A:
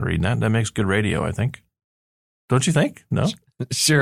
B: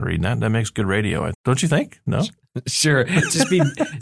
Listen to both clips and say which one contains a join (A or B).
B